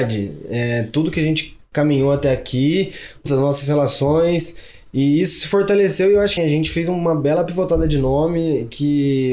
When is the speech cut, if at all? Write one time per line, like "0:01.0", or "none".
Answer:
0:03.3
0:06.4